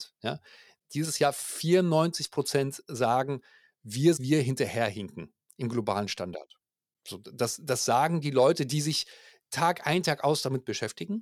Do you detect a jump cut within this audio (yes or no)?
yes